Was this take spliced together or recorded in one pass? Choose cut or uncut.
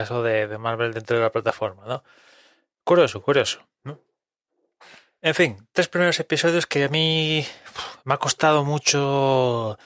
uncut